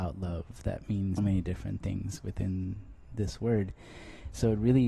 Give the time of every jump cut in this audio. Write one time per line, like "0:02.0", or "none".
0:01.2